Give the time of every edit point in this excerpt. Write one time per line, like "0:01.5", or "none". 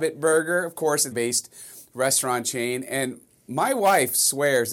0:01.1